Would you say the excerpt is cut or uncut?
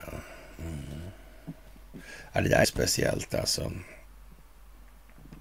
cut